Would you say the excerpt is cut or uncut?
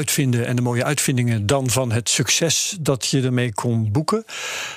uncut